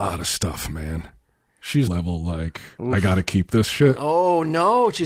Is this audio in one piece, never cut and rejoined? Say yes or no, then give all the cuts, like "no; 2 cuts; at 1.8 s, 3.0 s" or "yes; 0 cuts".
no; 1 cut; at 1.9 s